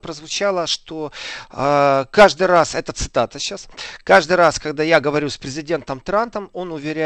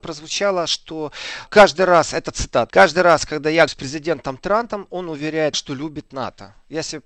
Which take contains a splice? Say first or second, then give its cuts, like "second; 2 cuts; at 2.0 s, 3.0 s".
second; 4 cuts; at 1.5 s, 2.7 s, 3.7 s, 5.5 s